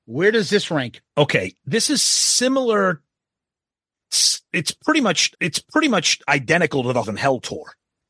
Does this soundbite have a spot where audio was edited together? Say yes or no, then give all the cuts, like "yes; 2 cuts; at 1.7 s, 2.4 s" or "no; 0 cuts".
yes; 3 cuts; at 1.1 s, 5.3 s, 7.0 s